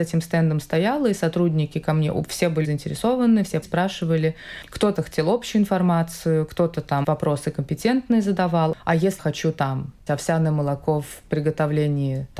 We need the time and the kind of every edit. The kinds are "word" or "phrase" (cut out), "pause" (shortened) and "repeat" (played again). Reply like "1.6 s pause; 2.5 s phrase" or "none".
2.6 s word; 3.6 s word; 4.9 s word; 7.0 s word; 9.2 s word; 10.1 s word